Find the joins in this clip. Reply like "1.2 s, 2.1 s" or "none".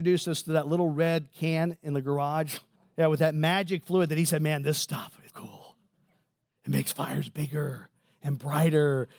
2.8 s, 5.3 s